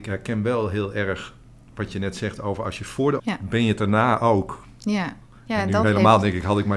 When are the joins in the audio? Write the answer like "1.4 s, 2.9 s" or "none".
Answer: 3.2 s